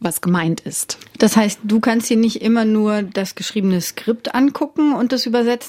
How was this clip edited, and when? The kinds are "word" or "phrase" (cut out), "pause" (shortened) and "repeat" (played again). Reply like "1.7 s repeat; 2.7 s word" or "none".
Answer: none